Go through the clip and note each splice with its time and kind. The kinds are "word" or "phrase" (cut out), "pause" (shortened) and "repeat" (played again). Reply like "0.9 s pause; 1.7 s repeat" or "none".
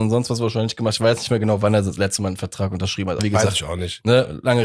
3.2 s word